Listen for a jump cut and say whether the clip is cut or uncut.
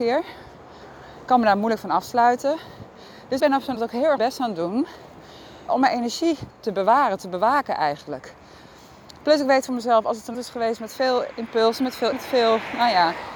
cut